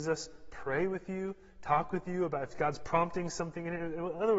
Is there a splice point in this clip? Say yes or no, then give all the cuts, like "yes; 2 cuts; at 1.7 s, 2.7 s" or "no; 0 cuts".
no; 0 cuts